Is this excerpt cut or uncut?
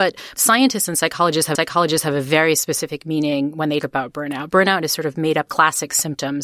cut